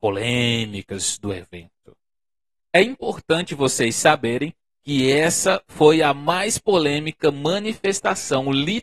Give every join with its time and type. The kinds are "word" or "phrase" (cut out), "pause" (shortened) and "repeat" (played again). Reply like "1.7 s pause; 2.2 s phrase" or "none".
none